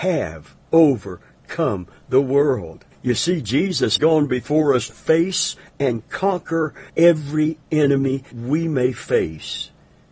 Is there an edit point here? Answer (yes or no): yes